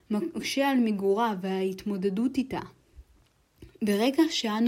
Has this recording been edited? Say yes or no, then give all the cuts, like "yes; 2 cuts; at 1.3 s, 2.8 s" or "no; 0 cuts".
no; 0 cuts